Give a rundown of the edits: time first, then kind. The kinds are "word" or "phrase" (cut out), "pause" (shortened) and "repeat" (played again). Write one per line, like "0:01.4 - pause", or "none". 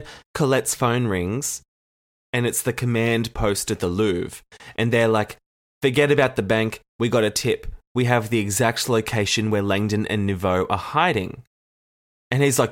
none